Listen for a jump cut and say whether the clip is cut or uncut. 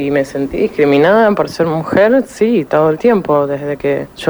cut